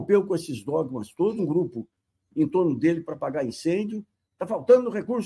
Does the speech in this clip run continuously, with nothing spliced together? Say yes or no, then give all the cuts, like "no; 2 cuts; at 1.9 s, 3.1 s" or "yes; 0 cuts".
no; 1 cut; at 1.4 s